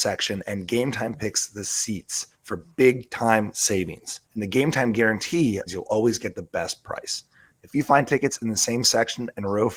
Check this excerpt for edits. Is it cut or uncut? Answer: cut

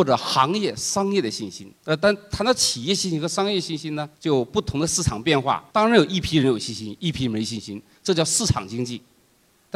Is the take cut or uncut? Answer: cut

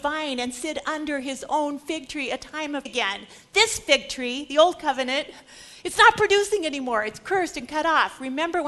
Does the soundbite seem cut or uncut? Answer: cut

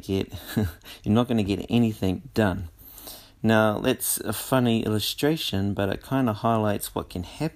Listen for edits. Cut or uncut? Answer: uncut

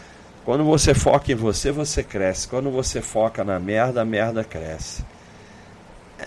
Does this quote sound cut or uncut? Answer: uncut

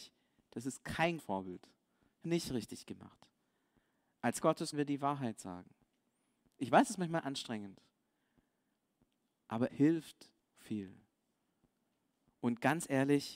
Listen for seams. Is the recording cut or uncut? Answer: cut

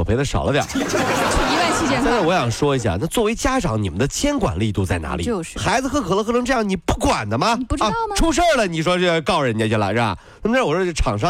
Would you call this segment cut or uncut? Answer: uncut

